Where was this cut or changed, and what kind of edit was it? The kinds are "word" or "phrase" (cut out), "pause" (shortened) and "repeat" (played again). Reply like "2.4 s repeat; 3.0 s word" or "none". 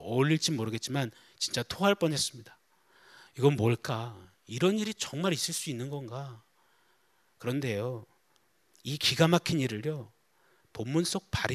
none